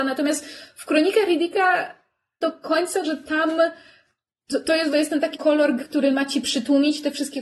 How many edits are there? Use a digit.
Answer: 5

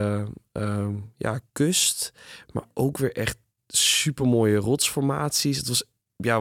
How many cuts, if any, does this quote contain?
0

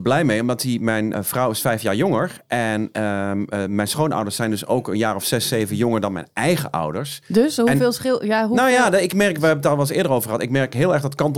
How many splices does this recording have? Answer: 1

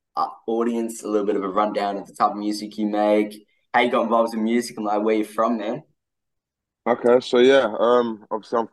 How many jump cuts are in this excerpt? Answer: 0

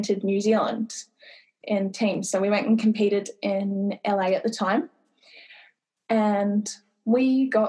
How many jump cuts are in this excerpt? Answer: 0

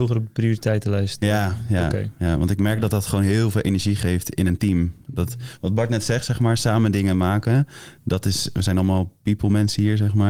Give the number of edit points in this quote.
0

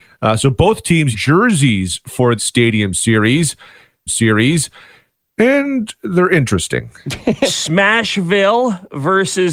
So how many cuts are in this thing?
3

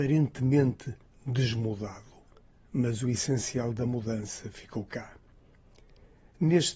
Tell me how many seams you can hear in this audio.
1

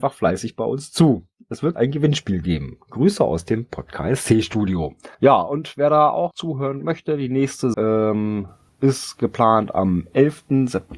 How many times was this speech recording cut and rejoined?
5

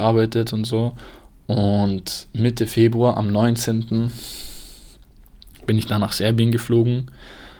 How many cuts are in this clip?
0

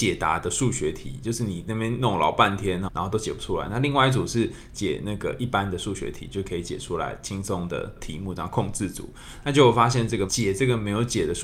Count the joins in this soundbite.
1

